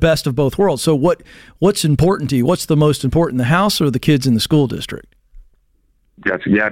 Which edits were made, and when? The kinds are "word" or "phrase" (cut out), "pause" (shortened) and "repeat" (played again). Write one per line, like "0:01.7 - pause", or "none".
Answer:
none